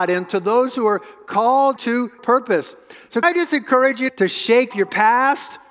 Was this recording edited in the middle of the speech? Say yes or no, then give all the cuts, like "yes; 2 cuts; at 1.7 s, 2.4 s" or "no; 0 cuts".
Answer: yes; 5 cuts; at 1.8 s, 2.2 s, 3.2 s, 4.1 s, 4.7 s